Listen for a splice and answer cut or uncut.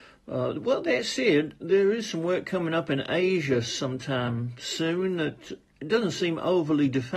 uncut